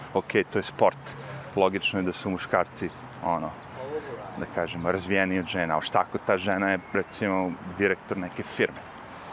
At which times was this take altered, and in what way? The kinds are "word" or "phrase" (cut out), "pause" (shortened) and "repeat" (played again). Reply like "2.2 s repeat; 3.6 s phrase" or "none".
none